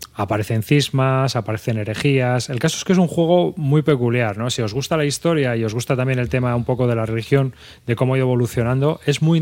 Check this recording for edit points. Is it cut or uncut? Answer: uncut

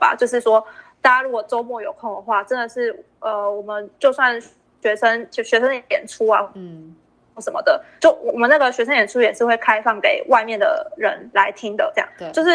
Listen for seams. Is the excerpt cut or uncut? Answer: uncut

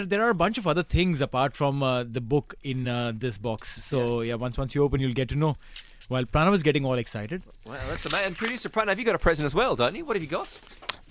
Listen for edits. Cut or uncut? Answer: uncut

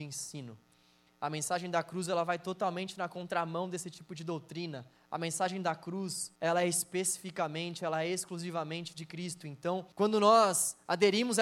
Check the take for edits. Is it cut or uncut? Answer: cut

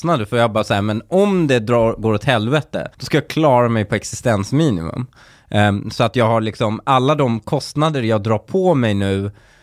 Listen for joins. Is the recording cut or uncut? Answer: cut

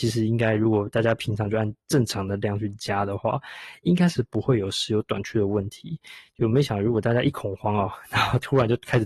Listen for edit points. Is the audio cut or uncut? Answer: uncut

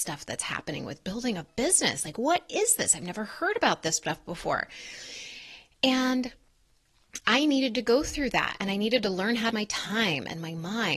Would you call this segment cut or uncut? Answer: cut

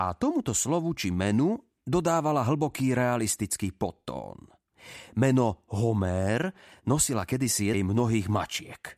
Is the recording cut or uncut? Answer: cut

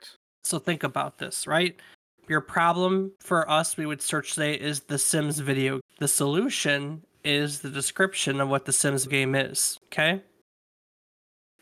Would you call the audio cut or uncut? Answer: cut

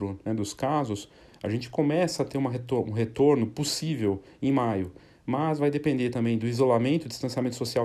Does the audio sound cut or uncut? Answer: uncut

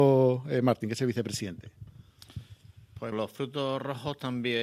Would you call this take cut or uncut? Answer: cut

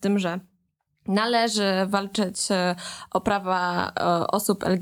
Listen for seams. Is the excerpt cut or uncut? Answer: uncut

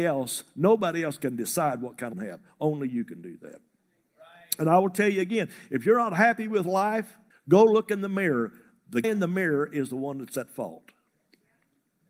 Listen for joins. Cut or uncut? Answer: cut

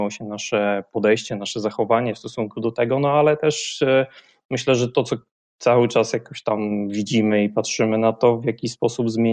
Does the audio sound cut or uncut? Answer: uncut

